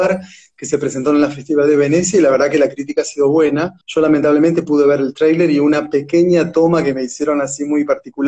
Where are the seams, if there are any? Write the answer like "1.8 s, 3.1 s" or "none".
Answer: 3.8 s